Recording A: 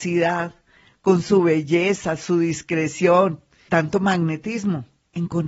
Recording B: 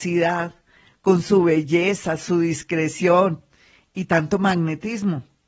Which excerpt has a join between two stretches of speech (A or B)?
A